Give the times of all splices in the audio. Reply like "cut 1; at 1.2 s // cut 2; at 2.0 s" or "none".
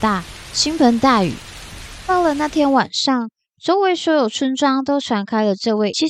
none